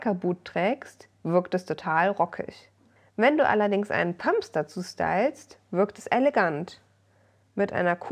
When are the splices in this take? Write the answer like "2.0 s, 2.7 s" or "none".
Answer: 3.0 s